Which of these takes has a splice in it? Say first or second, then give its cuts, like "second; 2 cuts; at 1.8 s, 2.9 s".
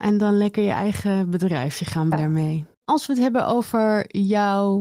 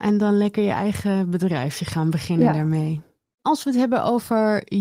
first; 2 cuts; at 2.1 s, 2.7 s